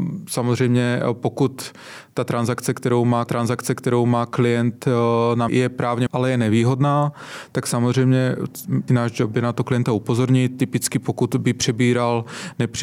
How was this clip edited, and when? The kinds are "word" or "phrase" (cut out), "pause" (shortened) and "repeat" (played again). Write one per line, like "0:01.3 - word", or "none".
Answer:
0:03.3 - repeat
0:05.5 - word
0:06.1 - word
0:08.9 - phrase